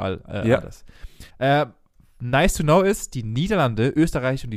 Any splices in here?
yes; 1 cut; at 1.3 s

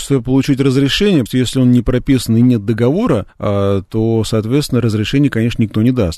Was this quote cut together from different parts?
yes; 2 cuts; at 1.3 s, 3.3 s

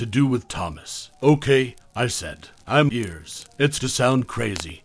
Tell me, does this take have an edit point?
yes; 2 cuts; at 2.9 s, 3.8 s

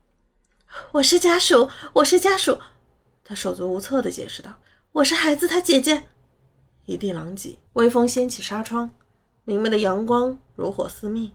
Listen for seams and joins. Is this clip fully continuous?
no; 2 cuts; at 4.6 s, 7.7 s

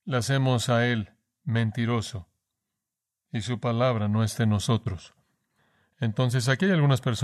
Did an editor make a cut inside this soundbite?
no; 0 cuts

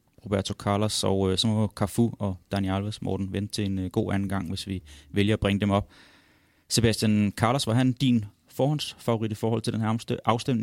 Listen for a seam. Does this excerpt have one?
no; 0 cuts

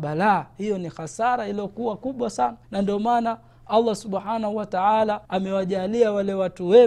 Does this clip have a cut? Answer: yes; 2 cuts; at 2.6 s, 5.2 s

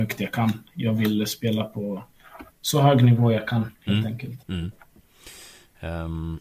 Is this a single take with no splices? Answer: no; 3 cuts; at 2.5 s, 3.8 s, 4.4 s

